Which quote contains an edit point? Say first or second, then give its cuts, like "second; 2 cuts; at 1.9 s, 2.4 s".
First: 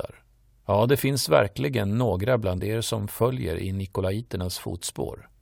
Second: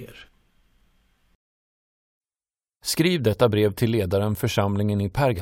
second; 1 cut; at 4.4 s